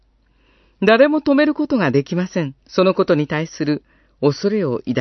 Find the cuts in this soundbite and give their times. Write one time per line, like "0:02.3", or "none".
0:02.6